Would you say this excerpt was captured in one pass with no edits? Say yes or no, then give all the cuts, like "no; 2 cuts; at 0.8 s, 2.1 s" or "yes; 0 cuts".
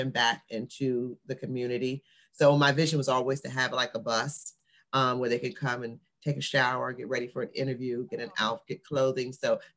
yes; 0 cuts